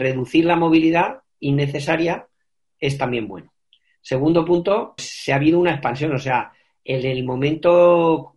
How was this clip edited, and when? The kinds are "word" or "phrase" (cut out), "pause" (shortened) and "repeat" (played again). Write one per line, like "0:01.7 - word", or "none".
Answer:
0:05.0 - word